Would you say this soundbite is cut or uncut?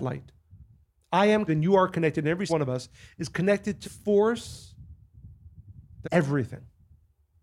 cut